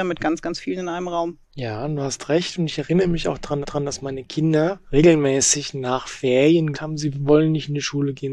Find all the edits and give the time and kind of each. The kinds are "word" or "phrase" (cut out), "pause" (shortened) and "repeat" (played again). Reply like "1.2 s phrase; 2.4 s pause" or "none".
1.4 s pause; 3.6 s repeat; 4.8 s pause; 6.7 s word